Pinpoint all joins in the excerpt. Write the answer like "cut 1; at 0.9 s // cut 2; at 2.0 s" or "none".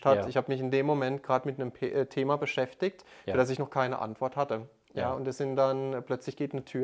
none